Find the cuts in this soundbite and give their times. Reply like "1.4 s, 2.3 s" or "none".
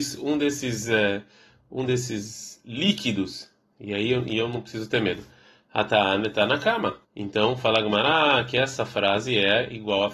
7.0 s